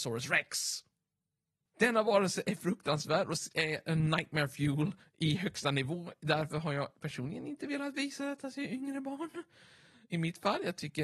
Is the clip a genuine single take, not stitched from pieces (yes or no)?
yes